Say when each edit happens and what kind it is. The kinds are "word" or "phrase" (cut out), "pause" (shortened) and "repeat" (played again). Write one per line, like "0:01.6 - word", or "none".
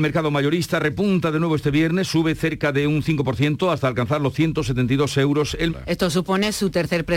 0:05.7 - word